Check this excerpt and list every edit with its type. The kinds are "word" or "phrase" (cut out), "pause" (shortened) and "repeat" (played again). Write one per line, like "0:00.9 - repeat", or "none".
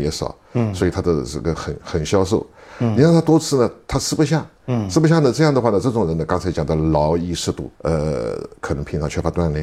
0:04.6 - pause
0:07.8 - pause